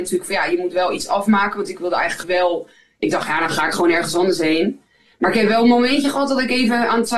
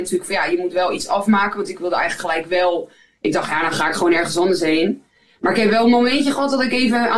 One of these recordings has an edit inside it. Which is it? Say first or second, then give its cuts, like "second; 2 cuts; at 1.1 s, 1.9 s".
first; 1 cut; at 2.2 s